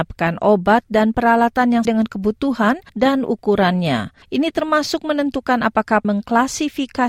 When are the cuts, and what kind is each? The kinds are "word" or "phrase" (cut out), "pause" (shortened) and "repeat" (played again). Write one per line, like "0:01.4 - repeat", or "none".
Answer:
0:01.8 - word
0:02.9 - pause
0:04.2 - pause
0:06.0 - word

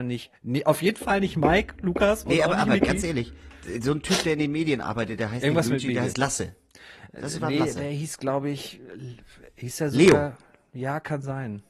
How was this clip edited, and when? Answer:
none

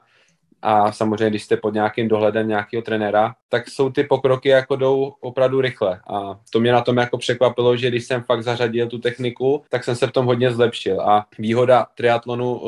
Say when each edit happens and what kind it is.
0:03.4 - pause
0:09.7 - pause
0:11.3 - pause

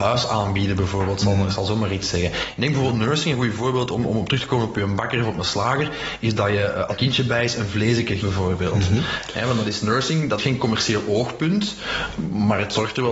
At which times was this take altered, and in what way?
0:06.9 - word
0:08.2 - word
0:10.4 - word

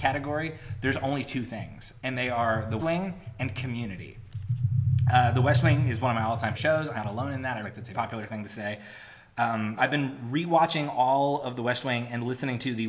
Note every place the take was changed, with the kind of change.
0:02.8 - word
0:06.5 - word
0:06.9 - word
0:07.6 - word
0:07.9 - word
0:09.8 - word

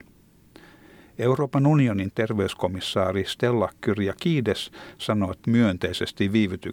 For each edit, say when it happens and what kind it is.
0:05.4 - phrase

